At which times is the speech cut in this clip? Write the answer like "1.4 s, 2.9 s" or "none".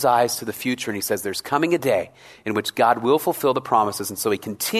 none